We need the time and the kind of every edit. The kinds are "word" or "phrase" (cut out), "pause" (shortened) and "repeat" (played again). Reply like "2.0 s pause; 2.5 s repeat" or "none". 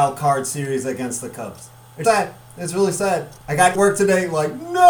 2.0 s word; 3.4 s pause; 3.7 s phrase